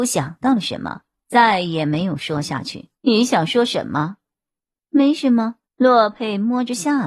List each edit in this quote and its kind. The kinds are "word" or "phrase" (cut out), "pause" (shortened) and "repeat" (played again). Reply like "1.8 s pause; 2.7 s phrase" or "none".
1.2 s pause; 2.9 s pause; 5.6 s pause

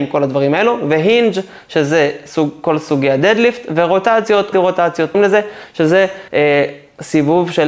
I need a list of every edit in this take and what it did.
4.5 s phrase; 5.1 s phrase; 6.3 s pause

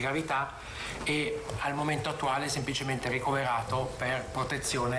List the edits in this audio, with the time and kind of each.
none

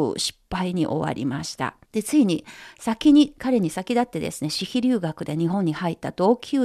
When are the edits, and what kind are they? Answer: 1.8 s pause

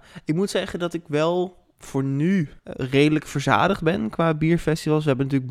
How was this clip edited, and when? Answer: 2.6 s pause

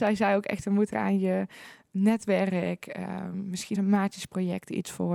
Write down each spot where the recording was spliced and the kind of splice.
0.9 s word; 3.7 s word

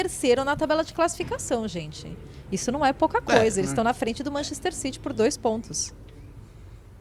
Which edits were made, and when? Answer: none

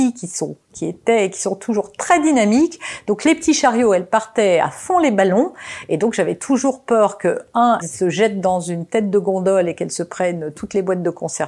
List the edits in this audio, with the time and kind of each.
7.8 s word

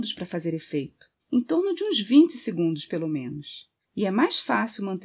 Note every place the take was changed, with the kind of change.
1.2 s pause; 3.8 s pause

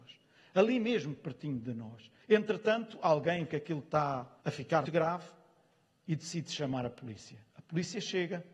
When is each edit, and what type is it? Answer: 2.2 s pause; 3.4 s word; 4.4 s pause; 4.8 s word; 7.5 s pause

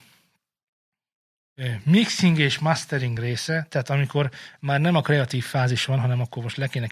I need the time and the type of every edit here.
none

